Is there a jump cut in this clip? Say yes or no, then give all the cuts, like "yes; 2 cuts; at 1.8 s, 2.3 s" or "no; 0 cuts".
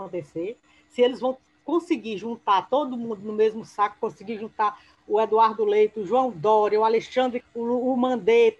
yes; 1 cut; at 7.4 s